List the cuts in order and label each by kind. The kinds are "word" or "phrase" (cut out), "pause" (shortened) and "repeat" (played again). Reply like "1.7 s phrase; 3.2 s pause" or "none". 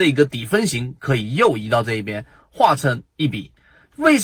none